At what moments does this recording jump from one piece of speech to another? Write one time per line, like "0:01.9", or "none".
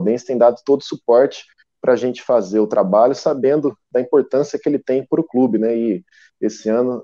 none